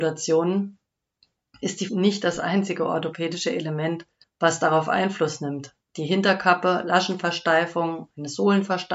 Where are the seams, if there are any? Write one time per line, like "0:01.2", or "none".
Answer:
0:01.9
0:04.2